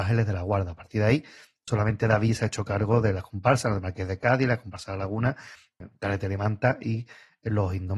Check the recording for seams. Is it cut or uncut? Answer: uncut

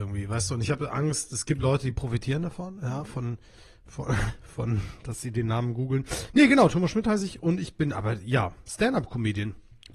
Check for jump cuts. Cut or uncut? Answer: uncut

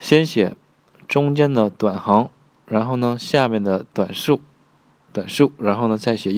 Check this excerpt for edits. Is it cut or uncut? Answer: uncut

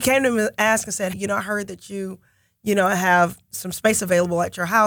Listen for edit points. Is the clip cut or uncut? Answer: cut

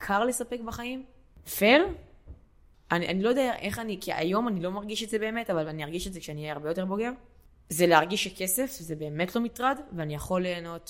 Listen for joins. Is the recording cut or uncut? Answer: uncut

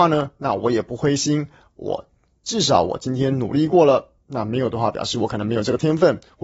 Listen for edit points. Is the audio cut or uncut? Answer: uncut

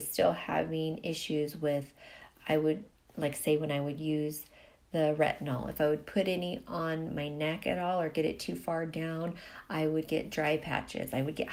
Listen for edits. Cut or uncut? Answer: uncut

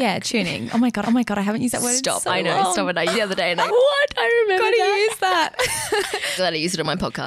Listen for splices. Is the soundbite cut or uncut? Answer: cut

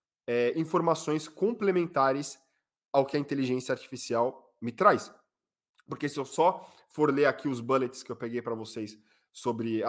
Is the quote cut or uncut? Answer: uncut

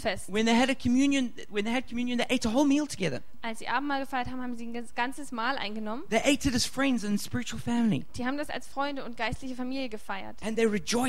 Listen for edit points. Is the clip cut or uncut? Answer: uncut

